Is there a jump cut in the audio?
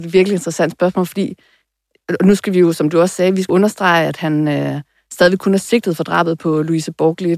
yes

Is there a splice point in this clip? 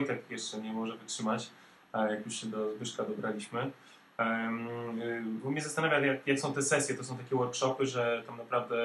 no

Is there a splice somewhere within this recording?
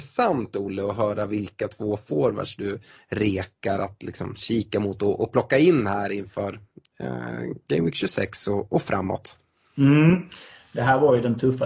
no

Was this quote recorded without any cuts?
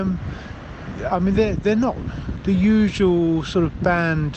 yes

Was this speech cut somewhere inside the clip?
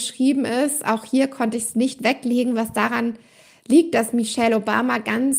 no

